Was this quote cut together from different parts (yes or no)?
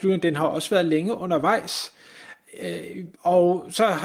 yes